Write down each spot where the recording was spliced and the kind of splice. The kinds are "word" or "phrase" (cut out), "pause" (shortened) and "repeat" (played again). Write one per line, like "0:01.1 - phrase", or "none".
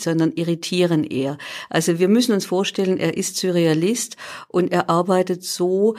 none